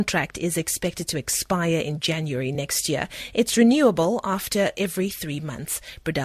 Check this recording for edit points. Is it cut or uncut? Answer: uncut